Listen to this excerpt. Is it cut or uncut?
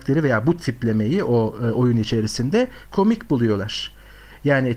uncut